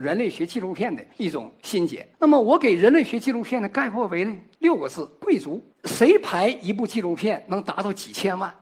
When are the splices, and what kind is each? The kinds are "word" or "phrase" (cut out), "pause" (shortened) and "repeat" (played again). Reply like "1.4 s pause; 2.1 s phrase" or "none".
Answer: 1.1 s pause; 2.1 s pause; 4.5 s pause; 5.7 s pause

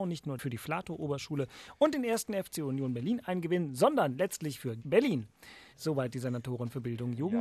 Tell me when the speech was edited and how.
4.8 s word; 5.7 s pause

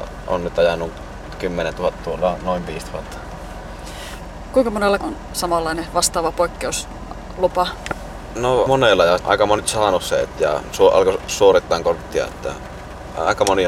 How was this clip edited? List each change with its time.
2.0 s word; 5.0 s word; 8.7 s word; 9.2 s word; 9.6 s word; 11.3 s word

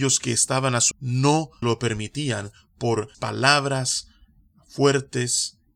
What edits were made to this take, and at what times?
0.9 s word; 1.6 s word; 3.1 s word

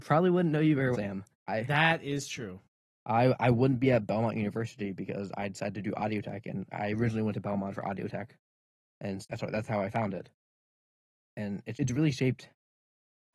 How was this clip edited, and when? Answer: 0.9 s word; 1.3 s word; 6.7 s word; 9.2 s word; 11.7 s word

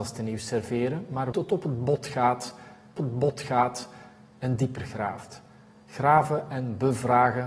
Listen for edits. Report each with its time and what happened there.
1.3 s phrase; 3.0 s repeat

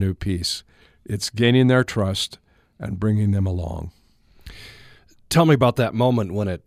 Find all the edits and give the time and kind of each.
none

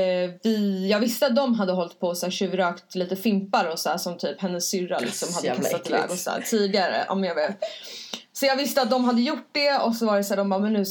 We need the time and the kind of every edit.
none

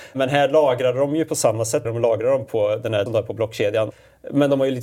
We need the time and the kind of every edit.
1.8 s phrase; 2.5 s word; 3.1 s word

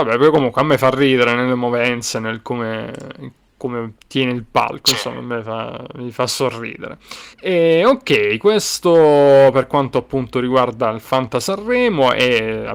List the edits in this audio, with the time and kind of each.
4.0 s pause; 7.3 s pause

